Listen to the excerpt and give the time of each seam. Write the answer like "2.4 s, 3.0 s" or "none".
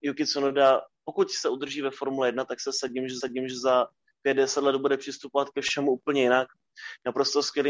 3.2 s